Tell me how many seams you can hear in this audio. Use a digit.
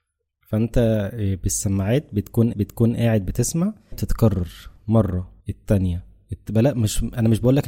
3